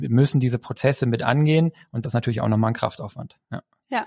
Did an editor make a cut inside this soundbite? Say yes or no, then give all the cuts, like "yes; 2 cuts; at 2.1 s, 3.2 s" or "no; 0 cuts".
yes; 1 cut; at 2.0 s